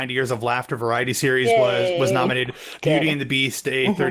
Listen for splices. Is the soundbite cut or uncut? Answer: uncut